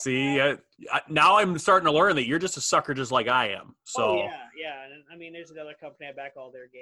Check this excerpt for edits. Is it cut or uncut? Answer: uncut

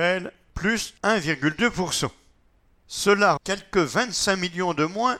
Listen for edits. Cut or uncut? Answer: cut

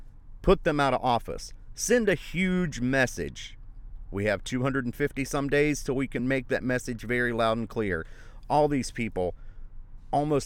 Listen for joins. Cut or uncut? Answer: uncut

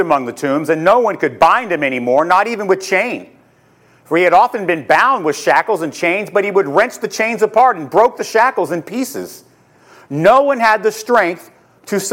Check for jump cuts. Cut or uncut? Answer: uncut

